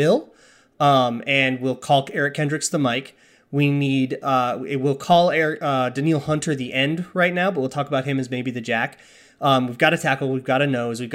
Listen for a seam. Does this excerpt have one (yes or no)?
no